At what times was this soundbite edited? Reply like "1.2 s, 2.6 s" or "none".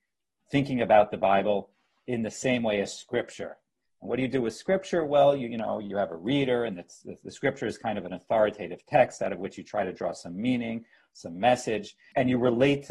none